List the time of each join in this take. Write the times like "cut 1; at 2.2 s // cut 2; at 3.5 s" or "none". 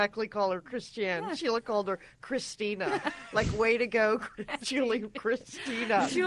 none